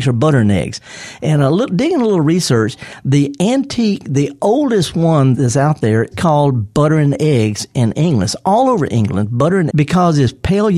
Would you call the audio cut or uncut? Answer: cut